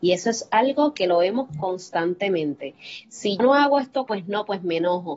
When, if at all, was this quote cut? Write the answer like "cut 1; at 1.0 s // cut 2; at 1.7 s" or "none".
cut 1; at 3.4 s // cut 2; at 4.1 s